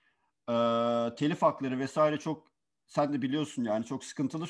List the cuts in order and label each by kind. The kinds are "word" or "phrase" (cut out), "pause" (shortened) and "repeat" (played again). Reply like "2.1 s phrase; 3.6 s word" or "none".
none